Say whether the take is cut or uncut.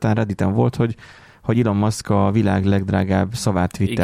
uncut